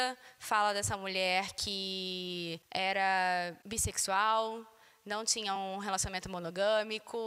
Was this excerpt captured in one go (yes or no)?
yes